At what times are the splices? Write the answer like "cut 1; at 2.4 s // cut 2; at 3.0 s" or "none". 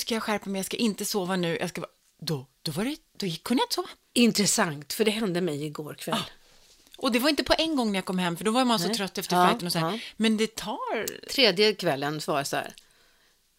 none